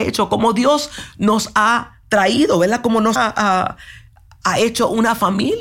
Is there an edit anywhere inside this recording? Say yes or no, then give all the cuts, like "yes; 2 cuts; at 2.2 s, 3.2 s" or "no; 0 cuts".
yes; 1 cut; at 3.2 s